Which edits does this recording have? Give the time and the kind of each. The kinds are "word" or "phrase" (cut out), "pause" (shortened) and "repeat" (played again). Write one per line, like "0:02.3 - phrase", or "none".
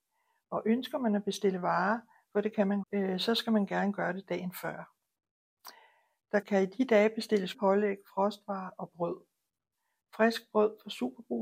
0:02.8 - word
0:06.4 - word
0:07.5 - word